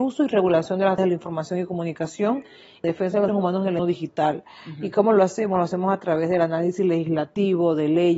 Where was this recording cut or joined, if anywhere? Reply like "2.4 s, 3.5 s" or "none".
1.0 s, 2.8 s, 3.3 s, 3.8 s